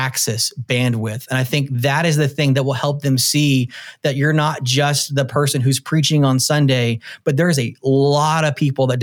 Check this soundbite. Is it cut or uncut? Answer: uncut